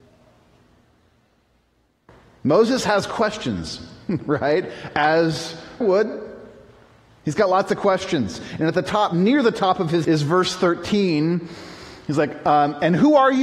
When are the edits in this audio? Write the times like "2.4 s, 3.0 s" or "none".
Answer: 5.8 s, 10.0 s